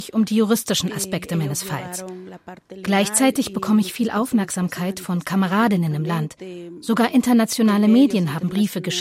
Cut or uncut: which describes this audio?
uncut